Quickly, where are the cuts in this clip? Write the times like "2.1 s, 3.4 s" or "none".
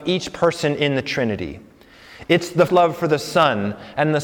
2.7 s